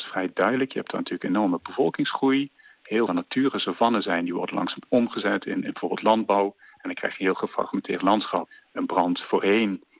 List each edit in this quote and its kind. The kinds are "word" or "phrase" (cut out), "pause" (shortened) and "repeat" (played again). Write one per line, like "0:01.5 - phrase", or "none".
0:03.1 - phrase

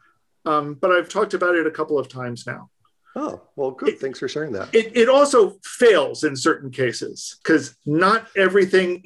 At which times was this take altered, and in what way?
0:01.1 - word
0:07.4 - pause

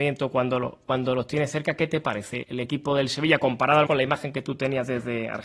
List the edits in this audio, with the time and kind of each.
0:02.4 - word
0:03.9 - word

